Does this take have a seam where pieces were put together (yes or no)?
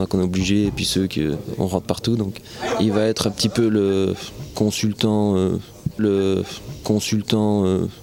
yes